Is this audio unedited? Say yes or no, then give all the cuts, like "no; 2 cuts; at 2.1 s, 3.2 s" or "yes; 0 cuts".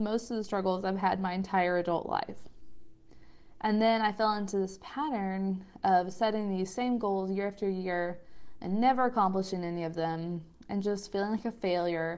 yes; 0 cuts